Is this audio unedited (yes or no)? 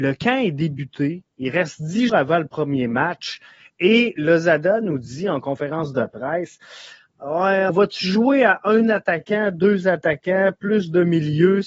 no